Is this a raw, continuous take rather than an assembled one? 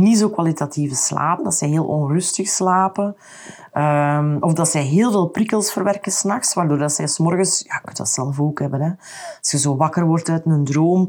no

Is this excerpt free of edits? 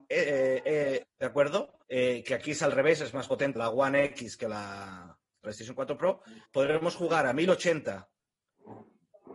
no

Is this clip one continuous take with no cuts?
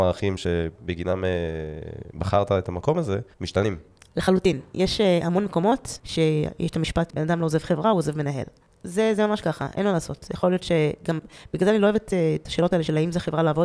no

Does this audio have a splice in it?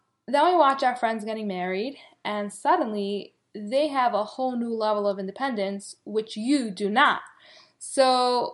no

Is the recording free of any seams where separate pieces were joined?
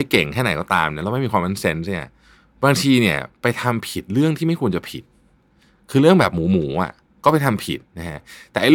yes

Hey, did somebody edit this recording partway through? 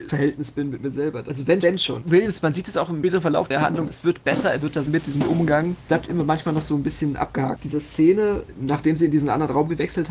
yes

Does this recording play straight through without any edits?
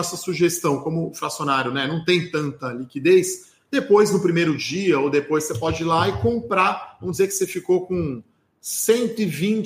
yes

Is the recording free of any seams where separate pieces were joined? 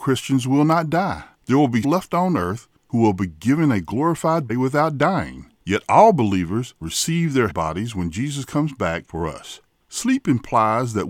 no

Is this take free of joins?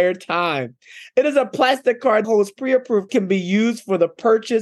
no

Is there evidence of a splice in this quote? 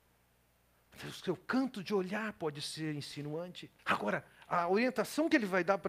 yes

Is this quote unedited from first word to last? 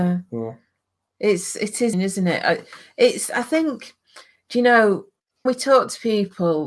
no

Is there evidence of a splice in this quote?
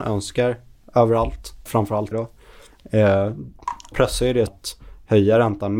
yes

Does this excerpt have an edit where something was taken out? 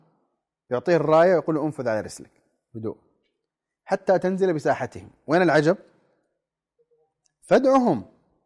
no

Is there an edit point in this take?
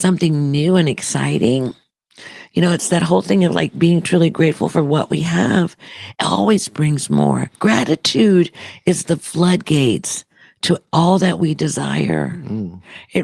no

